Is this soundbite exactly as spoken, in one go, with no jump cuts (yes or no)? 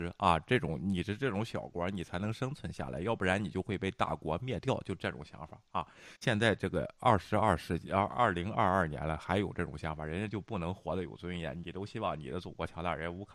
no